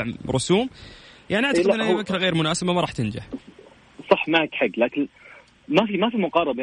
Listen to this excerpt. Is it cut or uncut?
uncut